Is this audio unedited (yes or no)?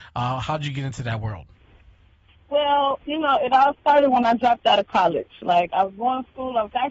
yes